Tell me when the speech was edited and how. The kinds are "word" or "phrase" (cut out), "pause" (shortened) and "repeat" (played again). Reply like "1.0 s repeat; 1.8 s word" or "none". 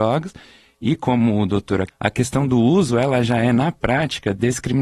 1.9 s word